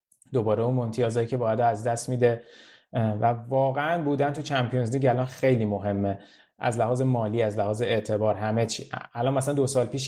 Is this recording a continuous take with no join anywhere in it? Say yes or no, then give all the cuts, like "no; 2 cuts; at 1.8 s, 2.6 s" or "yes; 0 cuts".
yes; 0 cuts